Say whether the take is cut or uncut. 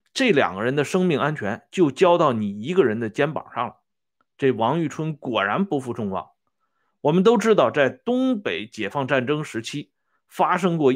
uncut